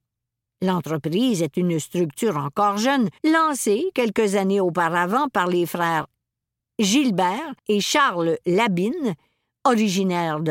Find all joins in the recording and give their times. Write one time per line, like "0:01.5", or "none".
0:03.2
0:07.6